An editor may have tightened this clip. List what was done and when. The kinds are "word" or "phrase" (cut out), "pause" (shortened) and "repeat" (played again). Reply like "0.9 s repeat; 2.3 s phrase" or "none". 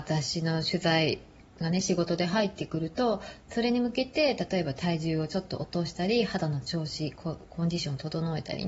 1.4 s pause